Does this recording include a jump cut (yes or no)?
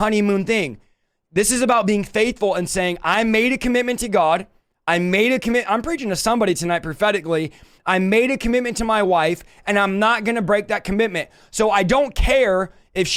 no